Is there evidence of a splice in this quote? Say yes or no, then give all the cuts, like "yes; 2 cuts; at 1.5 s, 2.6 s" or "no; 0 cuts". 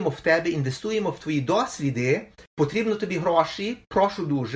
yes; 1 cut; at 2.5 s